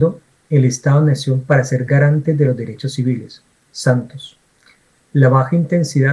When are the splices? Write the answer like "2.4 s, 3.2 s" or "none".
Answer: none